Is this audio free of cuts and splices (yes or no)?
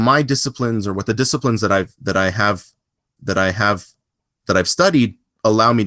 no